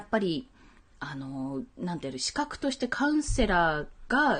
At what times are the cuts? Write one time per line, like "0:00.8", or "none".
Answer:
0:01.7